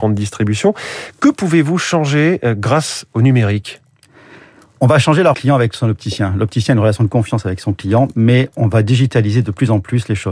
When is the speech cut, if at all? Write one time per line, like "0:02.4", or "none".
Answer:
0:05.3